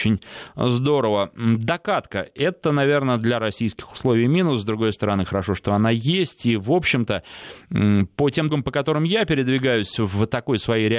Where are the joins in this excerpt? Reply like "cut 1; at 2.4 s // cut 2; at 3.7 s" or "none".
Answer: cut 1; at 8.5 s